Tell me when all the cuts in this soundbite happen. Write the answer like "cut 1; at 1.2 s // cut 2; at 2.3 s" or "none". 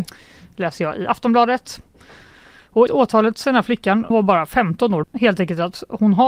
cut 1; at 2.9 s // cut 2; at 3.4 s // cut 3; at 4.1 s // cut 4; at 5.0 s